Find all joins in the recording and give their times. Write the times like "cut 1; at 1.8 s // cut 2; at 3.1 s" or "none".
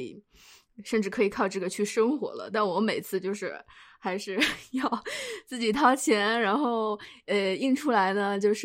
none